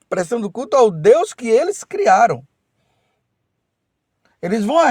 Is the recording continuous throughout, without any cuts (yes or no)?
yes